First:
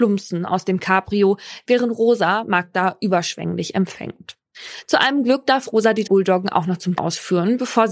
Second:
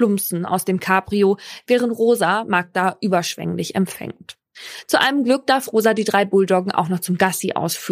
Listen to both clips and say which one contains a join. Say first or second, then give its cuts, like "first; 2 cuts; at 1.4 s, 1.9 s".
first; 2 cuts; at 6.0 s, 7.0 s